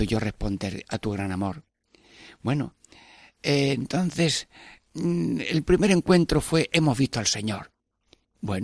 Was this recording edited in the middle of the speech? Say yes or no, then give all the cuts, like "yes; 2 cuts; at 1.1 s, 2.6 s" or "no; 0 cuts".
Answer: no; 0 cuts